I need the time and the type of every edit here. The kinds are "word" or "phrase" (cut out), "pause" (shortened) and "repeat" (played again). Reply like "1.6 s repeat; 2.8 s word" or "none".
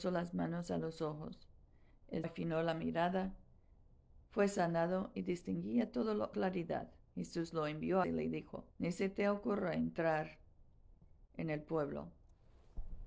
2.2 s word; 4.2 s pause; 6.3 s word; 7.0 s pause; 8.0 s phrase; 8.7 s pause